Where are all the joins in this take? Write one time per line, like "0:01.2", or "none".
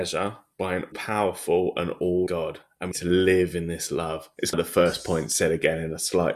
0:00.9
0:02.3
0:02.9
0:04.5